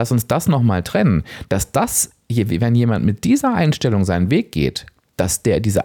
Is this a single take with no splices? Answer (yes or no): yes